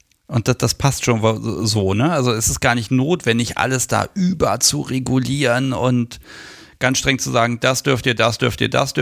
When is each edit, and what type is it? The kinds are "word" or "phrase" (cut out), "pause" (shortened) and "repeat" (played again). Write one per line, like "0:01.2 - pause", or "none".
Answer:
none